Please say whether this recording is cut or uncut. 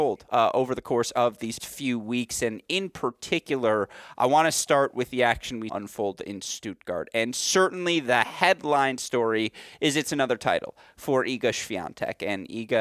cut